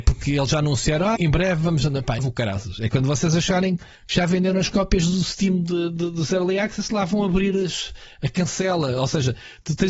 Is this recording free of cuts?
no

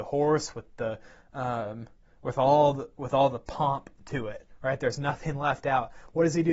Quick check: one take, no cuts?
yes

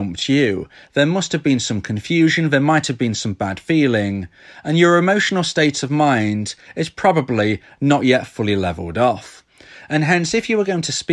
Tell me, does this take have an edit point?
no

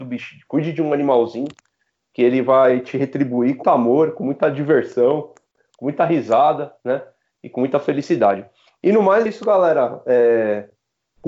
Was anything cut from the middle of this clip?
yes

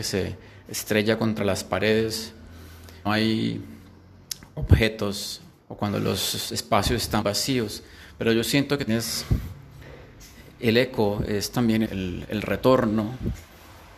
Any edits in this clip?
yes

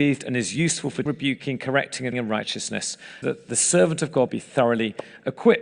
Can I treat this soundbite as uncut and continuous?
no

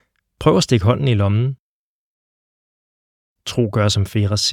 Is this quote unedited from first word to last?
yes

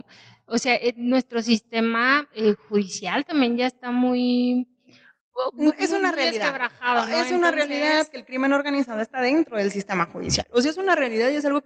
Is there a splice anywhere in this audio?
no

